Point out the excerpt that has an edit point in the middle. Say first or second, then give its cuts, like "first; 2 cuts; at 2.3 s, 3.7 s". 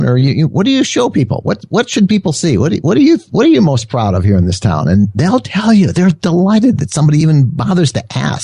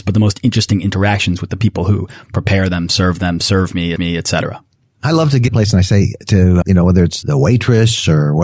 second; 4 cuts; at 4.0 s, 5.5 s, 6.6 s, 7.2 s